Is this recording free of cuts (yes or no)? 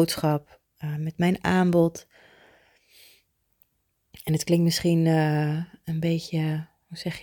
yes